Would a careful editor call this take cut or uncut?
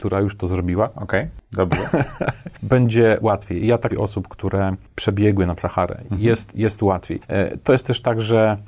cut